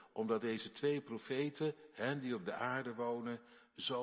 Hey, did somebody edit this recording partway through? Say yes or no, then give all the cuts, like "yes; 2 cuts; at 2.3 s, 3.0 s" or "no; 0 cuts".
no; 0 cuts